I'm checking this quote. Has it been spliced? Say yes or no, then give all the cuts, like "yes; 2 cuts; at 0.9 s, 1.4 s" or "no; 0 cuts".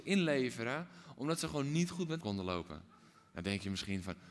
yes; 1 cut; at 2.2 s